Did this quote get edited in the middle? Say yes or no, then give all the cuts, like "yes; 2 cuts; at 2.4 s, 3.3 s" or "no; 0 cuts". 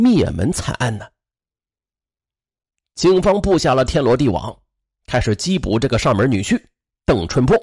no; 0 cuts